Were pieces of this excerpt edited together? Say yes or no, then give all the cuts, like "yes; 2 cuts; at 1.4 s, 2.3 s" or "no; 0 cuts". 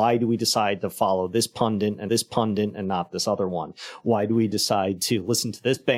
yes; 1 cut; at 2.1 s